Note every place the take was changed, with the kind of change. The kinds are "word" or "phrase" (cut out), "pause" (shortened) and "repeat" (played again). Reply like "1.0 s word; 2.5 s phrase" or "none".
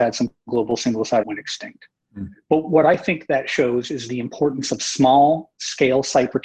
1.2 s phrase